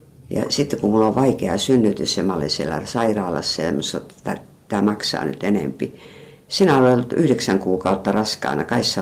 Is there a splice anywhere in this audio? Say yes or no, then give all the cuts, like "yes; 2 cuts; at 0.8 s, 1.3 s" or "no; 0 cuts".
no; 0 cuts